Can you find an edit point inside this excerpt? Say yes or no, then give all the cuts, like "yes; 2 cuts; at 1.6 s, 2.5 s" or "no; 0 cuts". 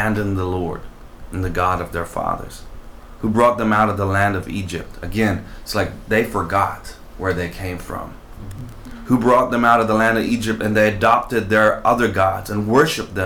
no; 0 cuts